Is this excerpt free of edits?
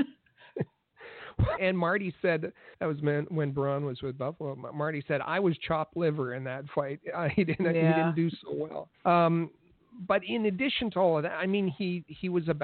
no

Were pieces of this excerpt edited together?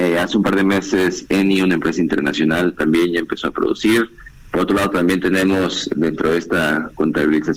no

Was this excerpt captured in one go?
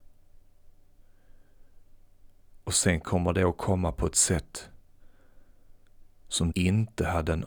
no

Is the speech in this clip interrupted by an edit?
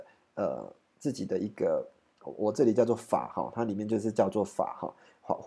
no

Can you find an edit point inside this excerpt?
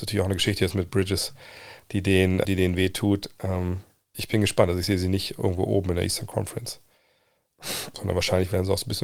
yes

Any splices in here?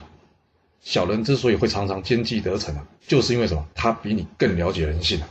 yes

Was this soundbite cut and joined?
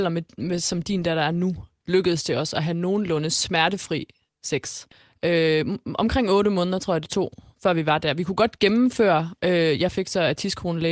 no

